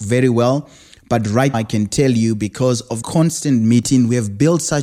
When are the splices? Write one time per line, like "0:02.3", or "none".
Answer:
0:01.5
0:03.0